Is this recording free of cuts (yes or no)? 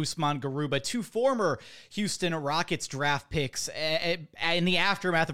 yes